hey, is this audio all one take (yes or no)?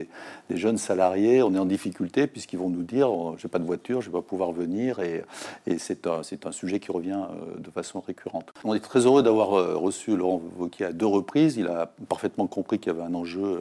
yes